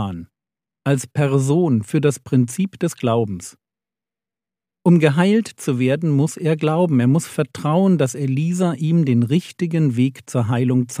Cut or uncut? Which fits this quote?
uncut